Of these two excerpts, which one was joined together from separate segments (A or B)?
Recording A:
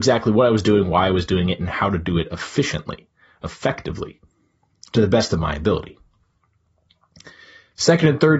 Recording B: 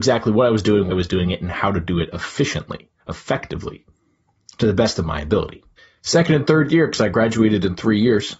B